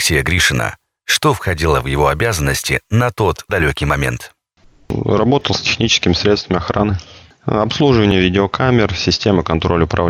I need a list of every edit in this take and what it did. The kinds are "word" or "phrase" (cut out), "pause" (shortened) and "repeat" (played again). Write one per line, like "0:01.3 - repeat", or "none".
0:03.5 - word